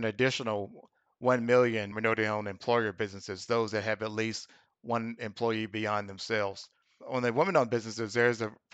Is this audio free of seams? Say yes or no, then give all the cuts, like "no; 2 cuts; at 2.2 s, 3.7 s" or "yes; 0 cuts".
yes; 0 cuts